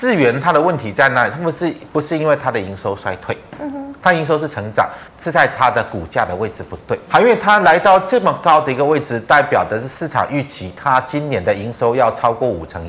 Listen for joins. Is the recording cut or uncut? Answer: cut